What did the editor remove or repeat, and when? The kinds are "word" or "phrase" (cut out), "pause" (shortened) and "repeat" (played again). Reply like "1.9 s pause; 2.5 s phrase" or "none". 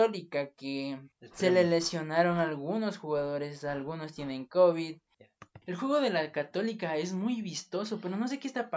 1.1 s pause; 5.6 s pause